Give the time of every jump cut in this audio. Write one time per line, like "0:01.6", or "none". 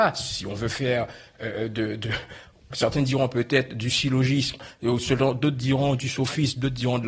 none